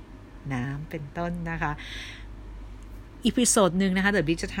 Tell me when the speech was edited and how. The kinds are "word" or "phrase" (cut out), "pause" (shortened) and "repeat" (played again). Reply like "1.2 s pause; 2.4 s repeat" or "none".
3.2 s phrase